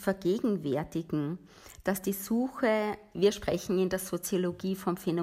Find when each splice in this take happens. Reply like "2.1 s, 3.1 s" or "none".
3.1 s